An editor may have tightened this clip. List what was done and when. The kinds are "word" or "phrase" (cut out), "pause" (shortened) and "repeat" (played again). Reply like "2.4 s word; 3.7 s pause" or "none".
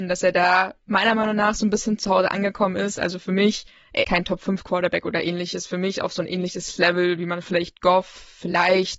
4.0 s word

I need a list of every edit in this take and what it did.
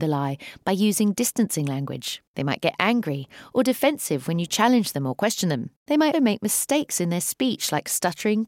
5.8 s pause; 6.1 s word

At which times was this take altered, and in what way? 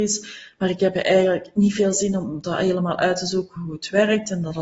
none

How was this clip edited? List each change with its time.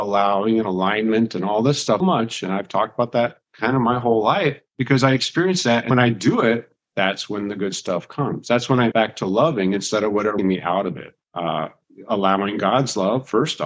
2.0 s word; 4.7 s pause; 5.9 s word; 8.9 s phrase; 10.4 s phrase; 11.2 s pause

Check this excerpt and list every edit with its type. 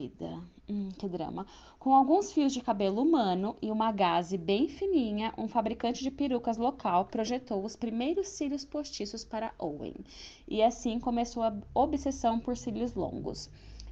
none

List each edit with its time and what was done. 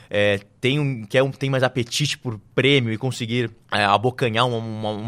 3.6 s pause

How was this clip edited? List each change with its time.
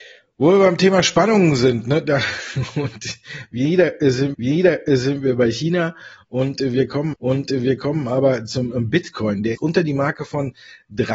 4.3 s repeat; 7.1 s repeat; 9.5 s phrase

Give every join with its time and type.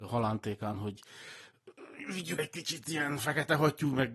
2.4 s word

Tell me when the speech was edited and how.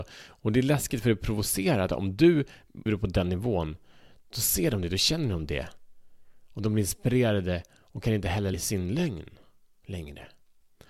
1.9 s word; 2.9 s word; 8.5 s word

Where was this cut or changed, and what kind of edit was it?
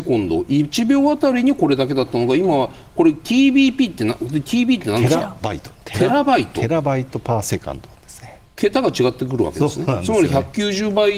8.5 s pause

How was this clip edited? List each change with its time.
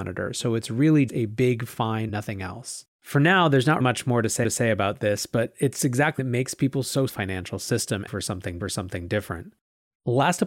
1.1 s word; 2.1 s word; 2.9 s pause; 3.8 s word; 4.4 s repeat; 6.2 s phrase; 7.1 s phrase; 8.1 s phrase; 8.6 s repeat

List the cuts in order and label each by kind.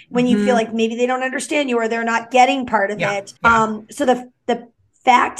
3.4 s pause

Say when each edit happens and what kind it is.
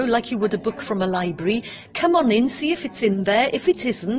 none

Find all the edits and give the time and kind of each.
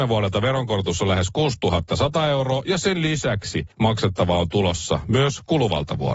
3.7 s pause

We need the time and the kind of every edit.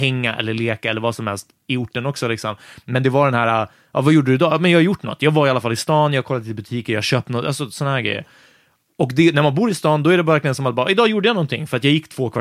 none

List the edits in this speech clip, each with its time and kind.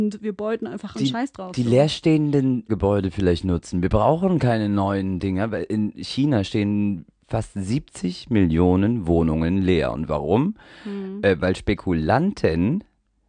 0.9 s word; 2.7 s word

